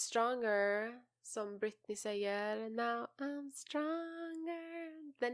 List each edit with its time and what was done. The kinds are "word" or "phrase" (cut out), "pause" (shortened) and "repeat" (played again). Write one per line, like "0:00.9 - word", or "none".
none